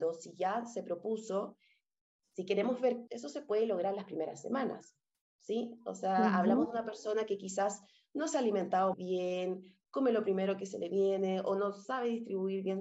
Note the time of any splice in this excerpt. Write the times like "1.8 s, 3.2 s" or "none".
3.1 s, 8.9 s